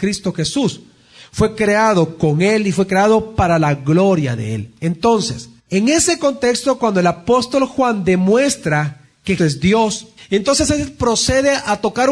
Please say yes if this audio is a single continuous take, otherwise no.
no